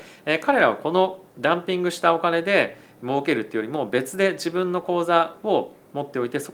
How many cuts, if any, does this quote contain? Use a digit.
1